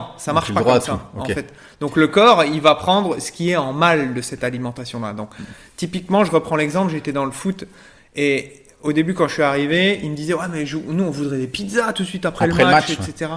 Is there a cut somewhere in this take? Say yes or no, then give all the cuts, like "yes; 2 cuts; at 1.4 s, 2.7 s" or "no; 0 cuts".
no; 0 cuts